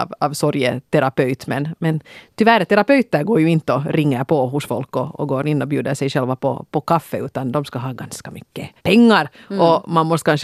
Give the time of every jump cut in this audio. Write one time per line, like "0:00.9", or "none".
0:08.8

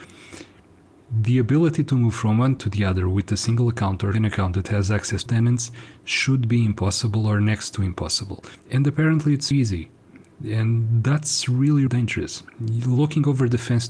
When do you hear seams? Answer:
0:02.6
0:04.1
0:05.3
0:08.6
0:09.5
0:11.9

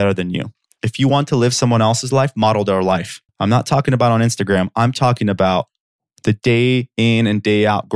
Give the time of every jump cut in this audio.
0:03.3

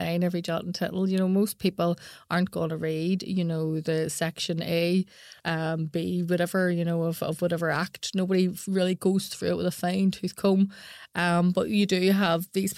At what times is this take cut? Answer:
0:05.4

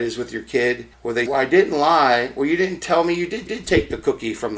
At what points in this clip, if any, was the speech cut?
0:00.9
0:01.3
0:03.5

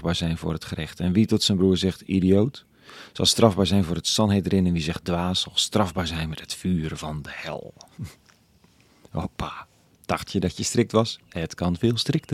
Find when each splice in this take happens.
none

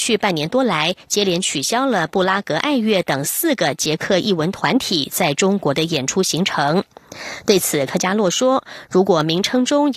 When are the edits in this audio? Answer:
none

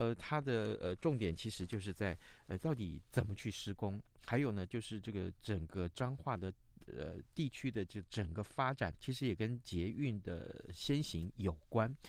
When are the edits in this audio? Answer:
0:08.9

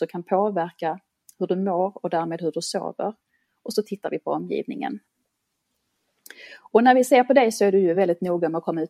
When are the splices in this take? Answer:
none

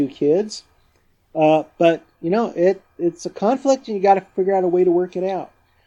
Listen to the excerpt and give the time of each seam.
none

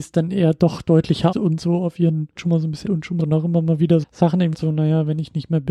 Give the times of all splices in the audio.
0:01.3
0:02.4
0:02.8
0:03.2
0:04.0
0:04.5

